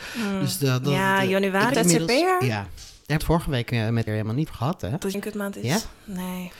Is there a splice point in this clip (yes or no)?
yes